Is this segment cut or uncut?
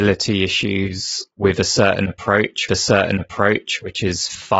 cut